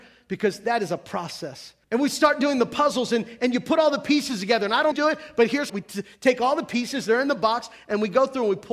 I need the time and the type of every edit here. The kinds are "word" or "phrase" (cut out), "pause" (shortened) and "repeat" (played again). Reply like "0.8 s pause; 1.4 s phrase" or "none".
1.8 s pause; 4.9 s phrase; 5.7 s phrase